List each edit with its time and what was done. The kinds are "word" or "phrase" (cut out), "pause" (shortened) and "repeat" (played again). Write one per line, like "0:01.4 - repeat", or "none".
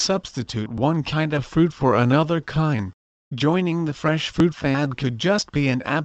0:03.1 - pause